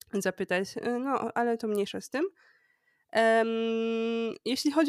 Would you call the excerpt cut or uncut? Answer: uncut